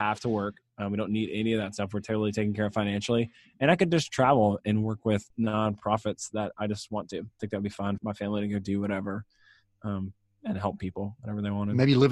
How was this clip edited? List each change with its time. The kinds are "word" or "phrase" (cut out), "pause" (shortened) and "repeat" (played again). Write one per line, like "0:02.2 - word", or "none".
0:07.4 - word
0:08.0 - word